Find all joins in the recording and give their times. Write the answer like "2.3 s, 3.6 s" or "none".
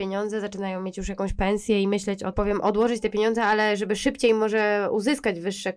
2.3 s